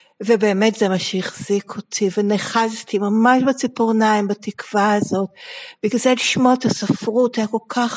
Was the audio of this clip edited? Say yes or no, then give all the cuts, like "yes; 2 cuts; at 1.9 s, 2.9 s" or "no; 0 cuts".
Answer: no; 0 cuts